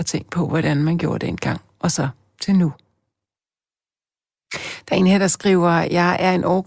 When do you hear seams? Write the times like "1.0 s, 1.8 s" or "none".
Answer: none